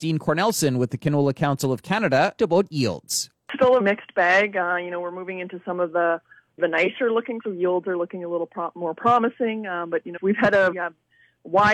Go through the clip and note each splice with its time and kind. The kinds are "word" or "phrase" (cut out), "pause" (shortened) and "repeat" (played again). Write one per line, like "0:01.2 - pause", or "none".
0:02.4 - word
0:03.8 - word
0:06.6 - word
0:07.4 - word
0:10.2 - word
0:10.7 - word